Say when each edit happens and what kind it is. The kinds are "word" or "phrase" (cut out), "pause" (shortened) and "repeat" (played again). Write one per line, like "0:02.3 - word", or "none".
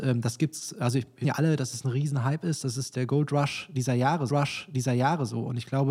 0:01.2 - word
0:04.3 - repeat